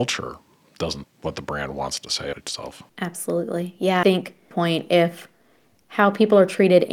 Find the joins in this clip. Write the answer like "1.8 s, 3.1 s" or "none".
1.0 s, 2.3 s, 4.0 s, 4.5 s